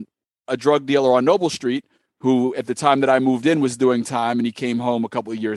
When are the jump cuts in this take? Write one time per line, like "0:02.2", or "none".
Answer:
none